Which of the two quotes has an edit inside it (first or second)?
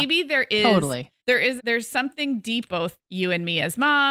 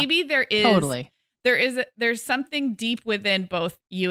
first